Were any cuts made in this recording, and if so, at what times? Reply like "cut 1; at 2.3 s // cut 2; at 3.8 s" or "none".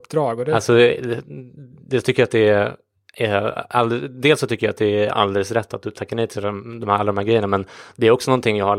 none